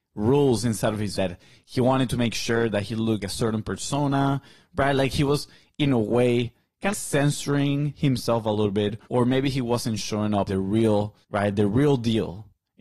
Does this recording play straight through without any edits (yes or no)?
no